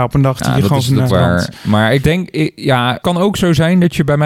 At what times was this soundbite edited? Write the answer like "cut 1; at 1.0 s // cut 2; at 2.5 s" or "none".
cut 1; at 1.1 s // cut 2; at 2.0 s // cut 3; at 3.0 s